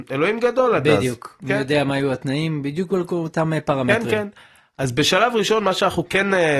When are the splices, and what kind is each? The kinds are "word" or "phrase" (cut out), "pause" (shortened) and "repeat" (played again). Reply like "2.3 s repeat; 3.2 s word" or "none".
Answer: none

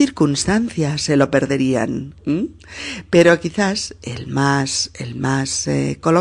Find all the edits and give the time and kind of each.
2.2 s pause

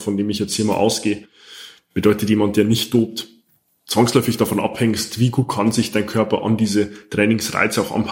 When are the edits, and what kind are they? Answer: none

